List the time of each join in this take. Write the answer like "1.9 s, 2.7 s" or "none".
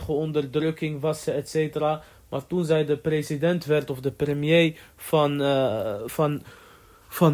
none